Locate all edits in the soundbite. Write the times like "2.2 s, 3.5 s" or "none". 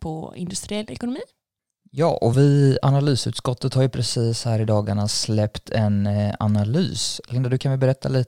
none